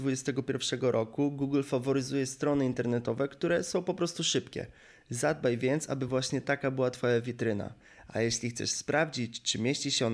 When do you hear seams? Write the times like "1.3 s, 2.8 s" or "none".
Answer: none

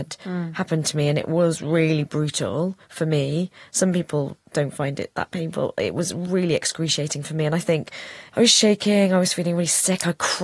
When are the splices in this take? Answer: none

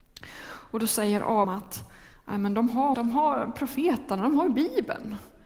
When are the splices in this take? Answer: 1.4 s, 2.1 s, 2.9 s

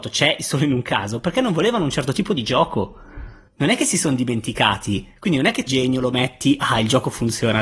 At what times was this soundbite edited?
5.7 s

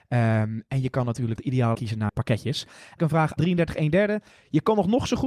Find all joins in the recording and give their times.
1.4 s, 1.7 s, 2.1 s, 3.0 s, 3.4 s

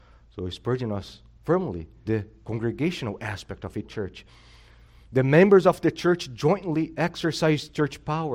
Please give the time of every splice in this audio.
2.1 s, 3.8 s

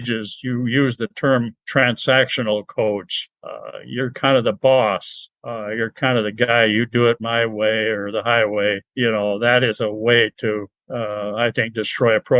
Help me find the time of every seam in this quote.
none

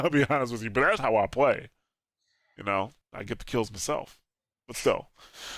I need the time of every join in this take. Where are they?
1.0 s, 3.0 s

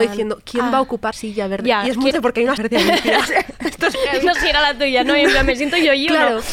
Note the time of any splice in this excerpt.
1.1 s, 2.1 s, 2.6 s, 3.9 s, 4.4 s

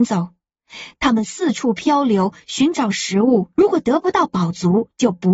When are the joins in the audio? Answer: 3.5 s

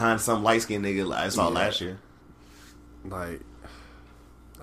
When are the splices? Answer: 1.3 s

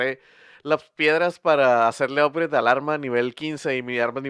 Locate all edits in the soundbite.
none

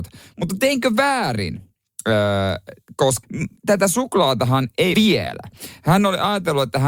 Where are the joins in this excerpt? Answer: 3.2 s, 3.6 s, 4.9 s

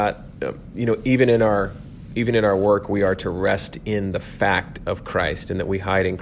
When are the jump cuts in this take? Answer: none

